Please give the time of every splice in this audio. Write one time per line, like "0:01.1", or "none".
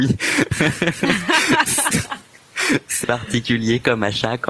0:03.0